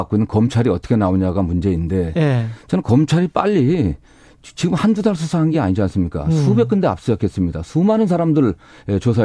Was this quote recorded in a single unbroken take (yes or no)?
yes